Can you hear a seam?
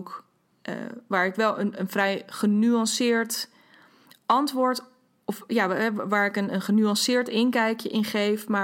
no; 0 cuts

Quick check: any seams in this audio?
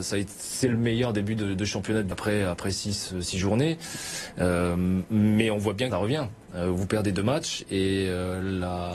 yes; 2 cuts; at 2.1 s, 5.9 s

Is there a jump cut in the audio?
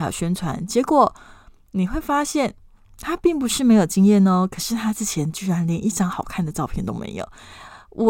no; 0 cuts

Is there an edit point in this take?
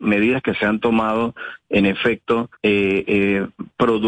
yes; 1 cut; at 2.5 s

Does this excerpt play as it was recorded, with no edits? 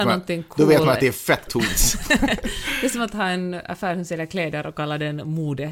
no; 1 cut; at 1.5 s

